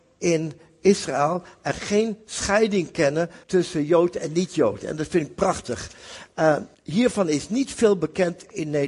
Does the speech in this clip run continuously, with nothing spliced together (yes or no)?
no